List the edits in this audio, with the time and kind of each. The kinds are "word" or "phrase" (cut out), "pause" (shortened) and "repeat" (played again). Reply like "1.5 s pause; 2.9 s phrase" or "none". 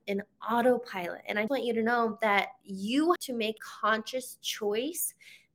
1.5 s word; 3.2 s word; 3.6 s word